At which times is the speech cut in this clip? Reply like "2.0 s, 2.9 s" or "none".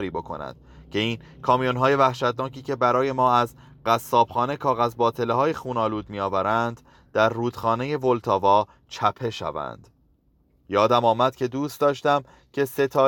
none

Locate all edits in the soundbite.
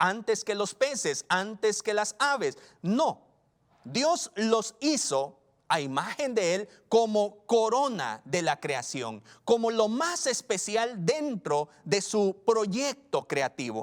none

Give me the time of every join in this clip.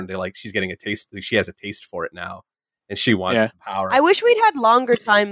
none

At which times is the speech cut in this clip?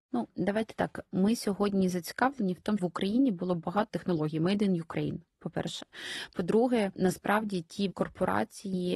2.8 s, 3.9 s, 7.9 s

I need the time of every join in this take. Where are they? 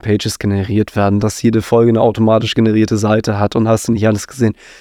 none

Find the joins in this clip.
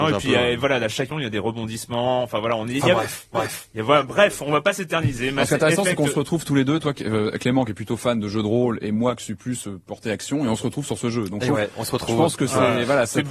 1.1 s, 3.3 s

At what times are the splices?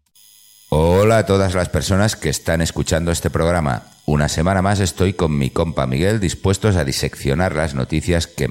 none

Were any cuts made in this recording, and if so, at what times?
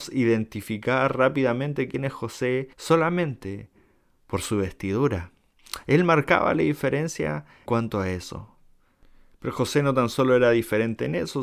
2.7 s, 7.7 s

